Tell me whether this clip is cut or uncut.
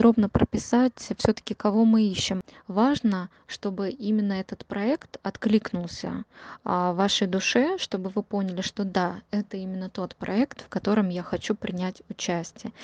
uncut